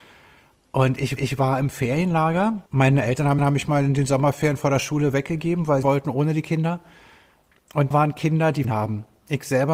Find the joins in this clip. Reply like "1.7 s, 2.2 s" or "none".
1.2 s, 2.7 s, 3.4 s, 5.8 s, 7.9 s, 8.6 s